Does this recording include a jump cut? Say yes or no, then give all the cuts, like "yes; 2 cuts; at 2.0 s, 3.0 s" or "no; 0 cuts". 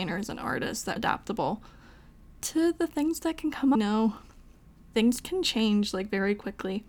yes; 2 cuts; at 1.0 s, 3.7 s